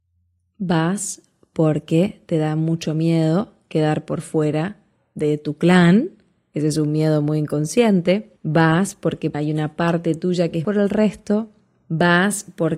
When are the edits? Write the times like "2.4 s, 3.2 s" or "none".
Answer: 10.6 s

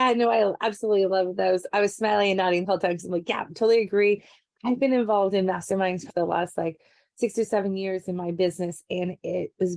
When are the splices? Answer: 6.1 s

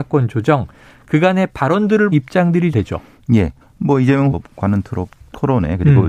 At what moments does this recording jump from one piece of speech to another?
2.1 s, 2.7 s, 3.6 s, 4.3 s

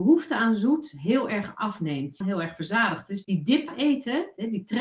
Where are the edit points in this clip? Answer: 2.2 s, 3.2 s, 3.7 s

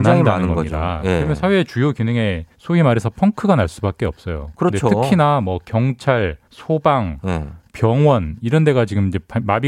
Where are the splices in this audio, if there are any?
2.5 s, 6.4 s

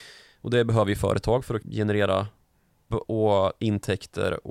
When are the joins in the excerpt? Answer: 1.6 s, 2.9 s

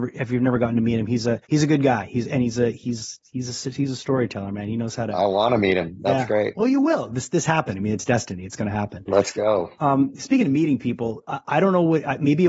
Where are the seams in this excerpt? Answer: 1.4 s

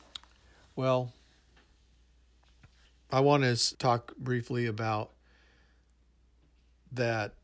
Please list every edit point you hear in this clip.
2.9 s, 3.7 s

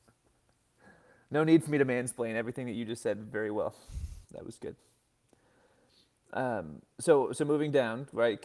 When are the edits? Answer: 4.2 s, 6.9 s

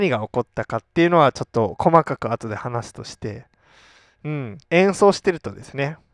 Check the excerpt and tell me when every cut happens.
4.6 s

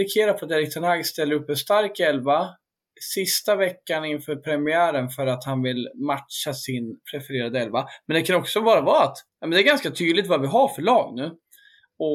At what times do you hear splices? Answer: 7.0 s, 9.3 s

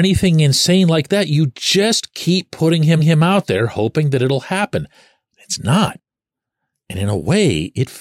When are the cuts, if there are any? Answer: 3.0 s

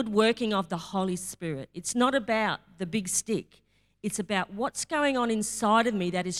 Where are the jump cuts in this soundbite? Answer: none

